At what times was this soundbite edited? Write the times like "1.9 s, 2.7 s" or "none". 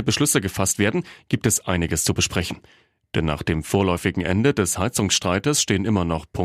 none